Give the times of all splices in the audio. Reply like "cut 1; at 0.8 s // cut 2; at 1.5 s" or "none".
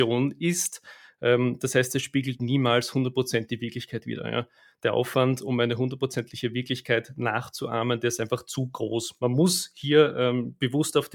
none